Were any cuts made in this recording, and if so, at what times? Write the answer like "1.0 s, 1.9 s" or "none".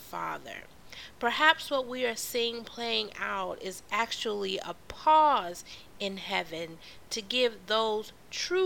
none